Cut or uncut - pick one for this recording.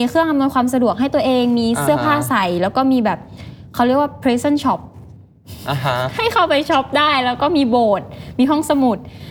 uncut